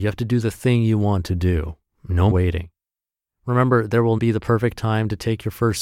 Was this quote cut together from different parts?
yes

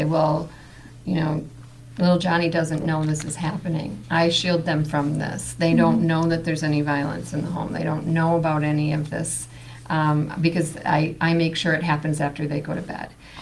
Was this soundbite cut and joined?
no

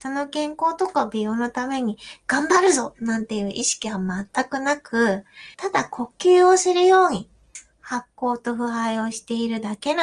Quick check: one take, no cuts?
no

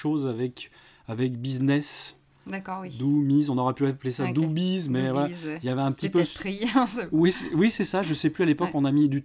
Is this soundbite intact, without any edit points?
yes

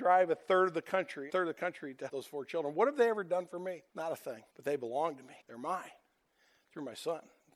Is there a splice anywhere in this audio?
yes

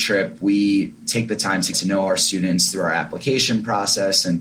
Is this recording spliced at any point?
yes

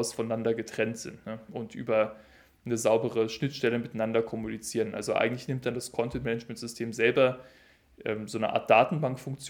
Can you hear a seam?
no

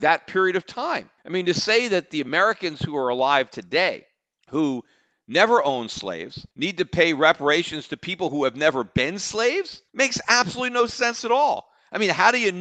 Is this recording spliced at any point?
yes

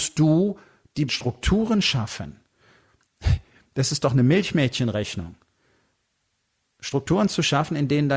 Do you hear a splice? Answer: yes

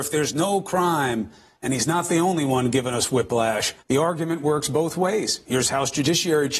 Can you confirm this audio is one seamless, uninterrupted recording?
no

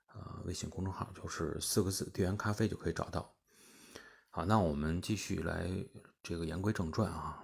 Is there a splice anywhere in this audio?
no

